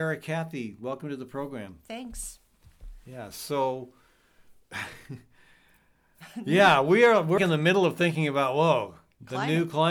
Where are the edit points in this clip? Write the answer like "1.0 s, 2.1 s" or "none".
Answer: 7.4 s